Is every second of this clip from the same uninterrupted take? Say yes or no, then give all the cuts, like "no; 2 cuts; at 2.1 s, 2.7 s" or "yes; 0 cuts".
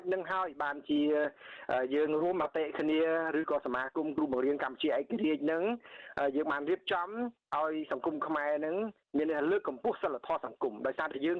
yes; 0 cuts